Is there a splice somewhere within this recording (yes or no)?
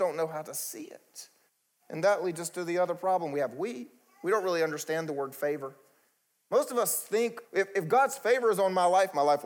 yes